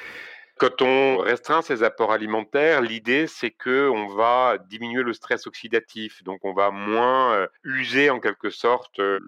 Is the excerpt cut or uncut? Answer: cut